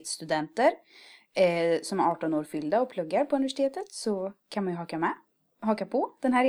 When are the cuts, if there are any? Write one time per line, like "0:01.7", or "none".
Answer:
none